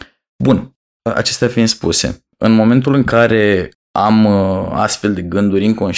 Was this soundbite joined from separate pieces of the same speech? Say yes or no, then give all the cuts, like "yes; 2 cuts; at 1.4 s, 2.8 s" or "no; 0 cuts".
no; 0 cuts